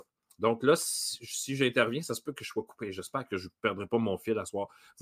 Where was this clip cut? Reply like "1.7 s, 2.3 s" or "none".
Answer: none